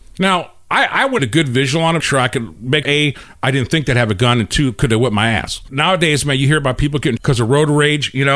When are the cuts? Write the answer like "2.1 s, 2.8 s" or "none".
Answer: 1.2 s, 2.0 s, 2.8 s, 7.2 s